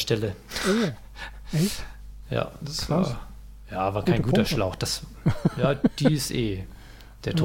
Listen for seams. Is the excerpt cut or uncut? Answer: uncut